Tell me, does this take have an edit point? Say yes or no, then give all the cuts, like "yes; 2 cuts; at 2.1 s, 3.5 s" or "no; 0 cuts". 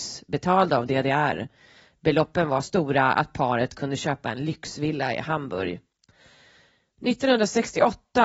yes; 1 cut; at 2.6 s